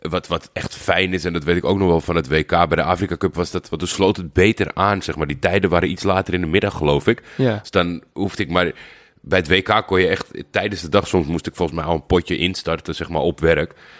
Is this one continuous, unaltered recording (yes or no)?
yes